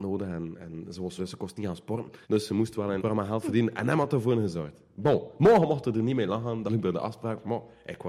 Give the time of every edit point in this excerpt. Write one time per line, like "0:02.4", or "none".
0:01.2
0:02.2
0:03.0
0:06.7